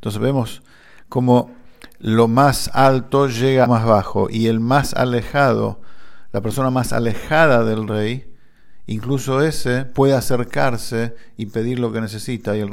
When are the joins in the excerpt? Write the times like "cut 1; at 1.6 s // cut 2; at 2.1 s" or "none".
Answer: cut 1; at 3.7 s